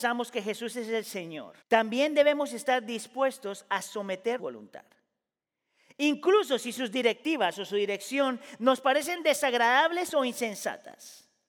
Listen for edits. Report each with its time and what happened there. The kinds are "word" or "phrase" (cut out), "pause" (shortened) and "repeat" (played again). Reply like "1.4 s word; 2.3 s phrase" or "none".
1.6 s pause; 4.4 s phrase